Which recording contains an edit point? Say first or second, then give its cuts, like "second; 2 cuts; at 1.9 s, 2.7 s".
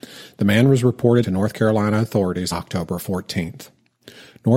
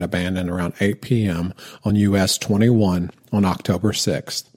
first; 2 cuts; at 1.2 s, 2.5 s